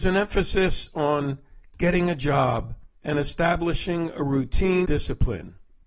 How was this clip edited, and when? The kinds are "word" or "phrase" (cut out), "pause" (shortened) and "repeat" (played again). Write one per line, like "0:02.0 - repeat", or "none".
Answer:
0:02.9 - pause
0:04.8 - word